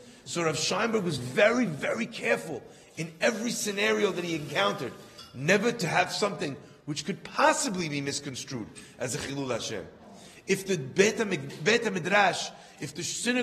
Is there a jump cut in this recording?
no; 0 cuts

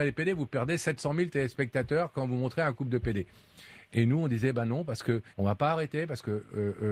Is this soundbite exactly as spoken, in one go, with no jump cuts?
no; 1 cut; at 5.3 s

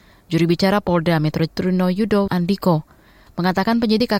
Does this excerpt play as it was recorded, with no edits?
no; 2 cuts; at 1.5 s, 2.3 s

